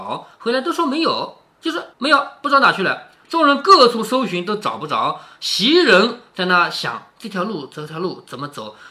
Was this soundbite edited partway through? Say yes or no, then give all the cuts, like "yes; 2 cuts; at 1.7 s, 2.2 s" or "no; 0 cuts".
yes; 1 cut; at 1.9 s